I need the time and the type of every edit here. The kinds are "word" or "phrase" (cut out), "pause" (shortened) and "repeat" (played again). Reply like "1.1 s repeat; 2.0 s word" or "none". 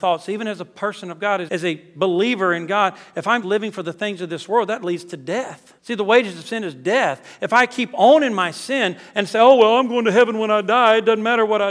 1.5 s word; 3.4 s word; 5.8 s pause